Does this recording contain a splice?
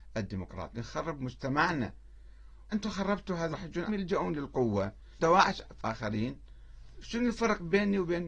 yes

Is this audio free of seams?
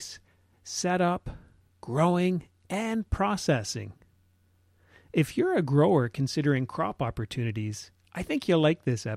yes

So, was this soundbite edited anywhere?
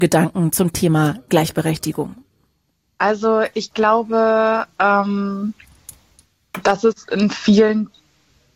no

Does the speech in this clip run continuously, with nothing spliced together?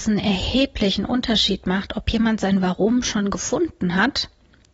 yes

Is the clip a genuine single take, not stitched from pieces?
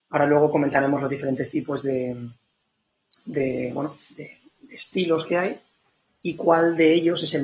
yes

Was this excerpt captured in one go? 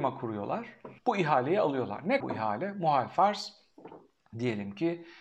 no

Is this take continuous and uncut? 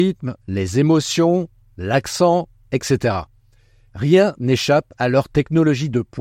yes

